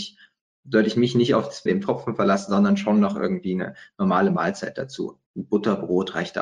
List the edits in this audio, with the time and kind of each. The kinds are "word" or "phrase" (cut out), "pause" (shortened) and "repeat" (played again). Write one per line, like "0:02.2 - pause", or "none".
0:01.7 - phrase
0:05.3 - pause